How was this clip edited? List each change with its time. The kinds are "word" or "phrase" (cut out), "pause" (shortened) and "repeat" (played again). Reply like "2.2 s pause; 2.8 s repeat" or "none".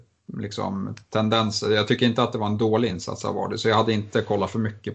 none